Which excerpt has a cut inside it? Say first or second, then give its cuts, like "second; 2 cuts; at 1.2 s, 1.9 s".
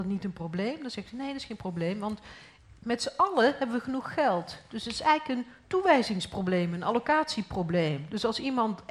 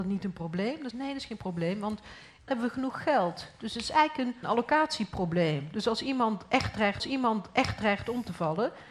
second; 4 cuts; at 0.9 s, 2.5 s, 4.4 s, 7.0 s